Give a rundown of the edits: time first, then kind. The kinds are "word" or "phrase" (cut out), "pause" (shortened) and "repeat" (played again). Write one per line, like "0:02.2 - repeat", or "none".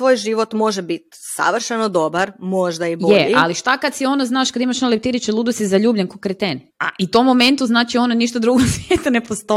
0:06.7 - pause